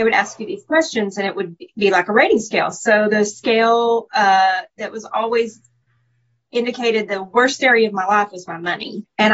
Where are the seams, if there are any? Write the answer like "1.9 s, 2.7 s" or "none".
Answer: none